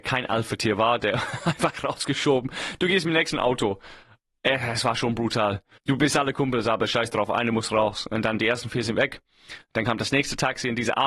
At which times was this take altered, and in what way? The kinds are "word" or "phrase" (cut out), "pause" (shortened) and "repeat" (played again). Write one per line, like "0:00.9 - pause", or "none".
0:05.8 - pause